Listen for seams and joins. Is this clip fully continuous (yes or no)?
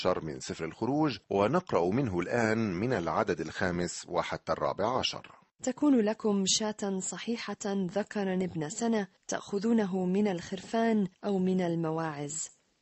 no